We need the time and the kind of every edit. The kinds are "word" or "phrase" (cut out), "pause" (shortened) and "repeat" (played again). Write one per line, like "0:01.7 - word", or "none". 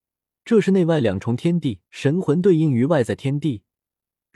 0:01.9 - pause